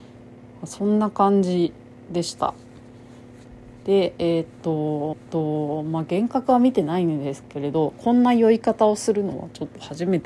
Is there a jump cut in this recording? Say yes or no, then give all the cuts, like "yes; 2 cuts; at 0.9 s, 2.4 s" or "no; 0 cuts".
yes; 1 cut; at 5.1 s